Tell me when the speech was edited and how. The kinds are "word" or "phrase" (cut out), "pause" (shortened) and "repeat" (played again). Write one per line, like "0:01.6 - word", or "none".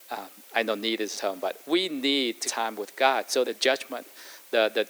0:01.2 - word
0:02.5 - word
0:03.4 - word